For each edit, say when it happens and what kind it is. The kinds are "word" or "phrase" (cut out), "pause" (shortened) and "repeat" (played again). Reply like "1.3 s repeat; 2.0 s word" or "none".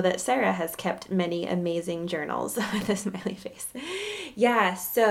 none